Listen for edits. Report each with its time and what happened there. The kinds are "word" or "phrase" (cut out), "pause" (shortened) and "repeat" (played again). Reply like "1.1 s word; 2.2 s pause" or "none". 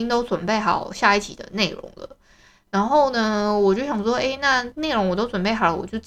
none